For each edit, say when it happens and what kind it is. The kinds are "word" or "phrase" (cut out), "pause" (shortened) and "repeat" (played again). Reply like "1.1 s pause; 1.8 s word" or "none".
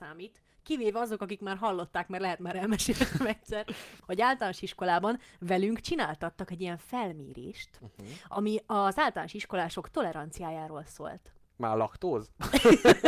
4.0 s pause